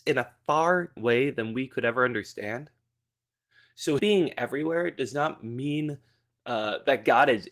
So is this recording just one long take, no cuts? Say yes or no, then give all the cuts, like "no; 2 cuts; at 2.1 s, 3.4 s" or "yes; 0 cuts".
no; 2 cuts; at 1.0 s, 4.0 s